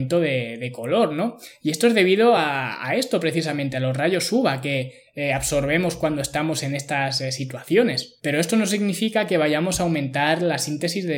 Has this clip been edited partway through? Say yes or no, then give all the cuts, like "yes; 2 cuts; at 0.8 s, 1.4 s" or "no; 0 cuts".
no; 0 cuts